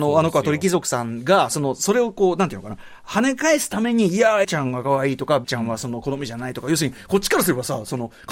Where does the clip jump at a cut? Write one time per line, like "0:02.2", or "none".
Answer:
0:04.4
0:05.4